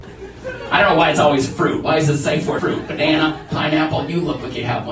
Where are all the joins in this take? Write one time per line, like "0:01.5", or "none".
0:02.6